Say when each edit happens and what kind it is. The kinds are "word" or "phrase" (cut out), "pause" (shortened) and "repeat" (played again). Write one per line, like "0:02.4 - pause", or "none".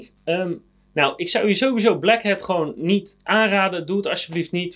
none